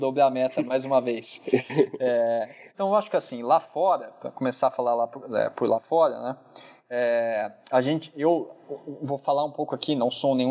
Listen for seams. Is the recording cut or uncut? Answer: cut